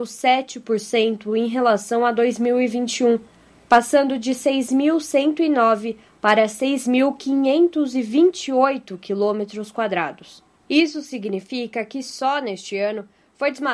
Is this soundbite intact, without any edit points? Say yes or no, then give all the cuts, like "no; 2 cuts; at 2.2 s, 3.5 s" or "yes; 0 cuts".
yes; 0 cuts